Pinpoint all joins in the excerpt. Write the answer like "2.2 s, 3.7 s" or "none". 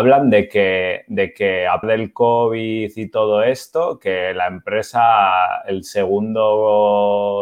1.8 s

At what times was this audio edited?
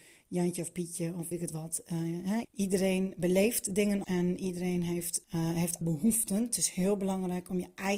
1.3 s, 2.4 s, 4.0 s, 5.2 s, 5.8 s

